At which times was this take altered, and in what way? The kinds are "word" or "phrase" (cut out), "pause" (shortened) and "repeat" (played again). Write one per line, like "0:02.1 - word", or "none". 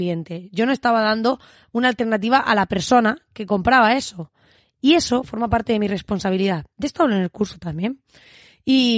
none